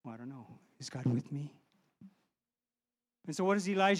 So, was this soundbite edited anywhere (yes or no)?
no